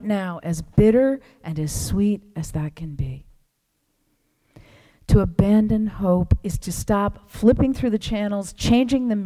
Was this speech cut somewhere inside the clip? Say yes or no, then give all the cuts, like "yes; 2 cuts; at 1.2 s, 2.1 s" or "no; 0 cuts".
no; 0 cuts